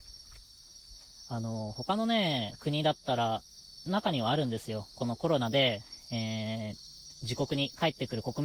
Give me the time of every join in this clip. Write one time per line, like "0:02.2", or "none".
none